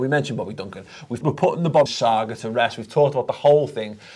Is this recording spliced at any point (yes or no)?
yes